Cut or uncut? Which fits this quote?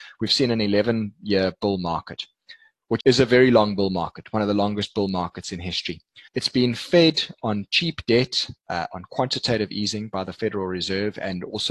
cut